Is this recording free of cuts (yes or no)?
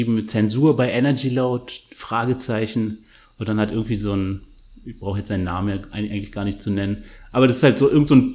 yes